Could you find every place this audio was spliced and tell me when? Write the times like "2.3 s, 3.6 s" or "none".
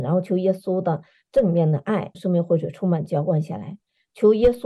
2.1 s

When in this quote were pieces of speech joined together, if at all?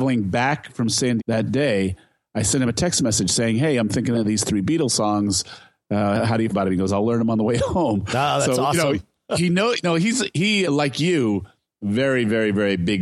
1.2 s, 6.5 s, 10.6 s

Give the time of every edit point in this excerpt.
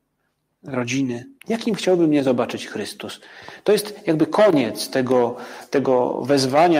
1.4 s

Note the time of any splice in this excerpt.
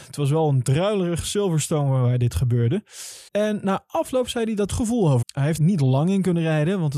3.3 s, 4.7 s, 5.2 s, 5.6 s

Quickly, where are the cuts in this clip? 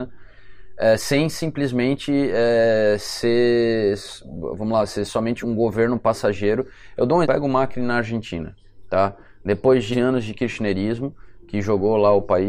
5.4 s, 7.2 s, 9.9 s

